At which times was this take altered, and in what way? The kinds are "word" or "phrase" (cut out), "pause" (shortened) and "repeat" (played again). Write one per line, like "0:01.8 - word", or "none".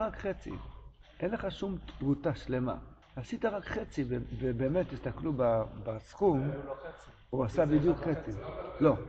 0:03.0 - pause